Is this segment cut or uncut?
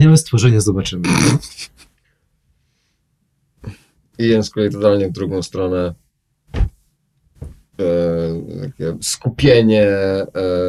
uncut